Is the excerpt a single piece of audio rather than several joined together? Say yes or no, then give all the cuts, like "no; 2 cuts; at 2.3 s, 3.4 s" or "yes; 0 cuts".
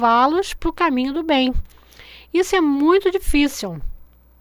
yes; 0 cuts